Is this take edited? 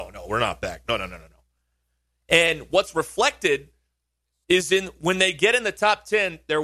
no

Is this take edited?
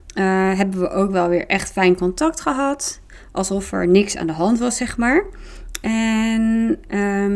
no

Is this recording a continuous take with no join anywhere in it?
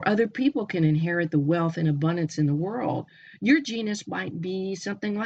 yes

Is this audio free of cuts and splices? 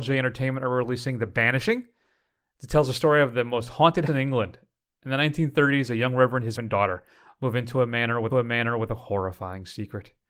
no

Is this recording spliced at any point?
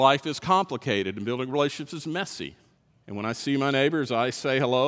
yes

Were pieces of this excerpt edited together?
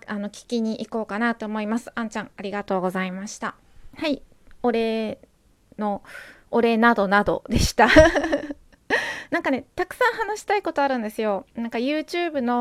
no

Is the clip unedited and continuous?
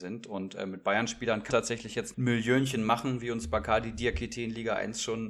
no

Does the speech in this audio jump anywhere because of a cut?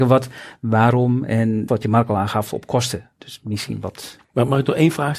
yes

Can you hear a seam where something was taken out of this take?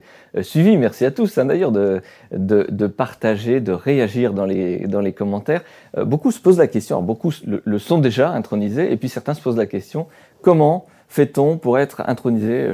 no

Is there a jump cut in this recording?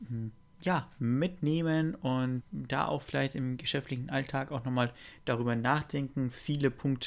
yes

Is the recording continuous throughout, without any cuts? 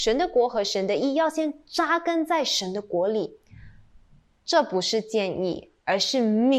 yes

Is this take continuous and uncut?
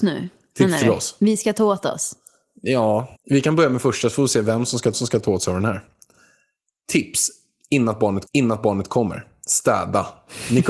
no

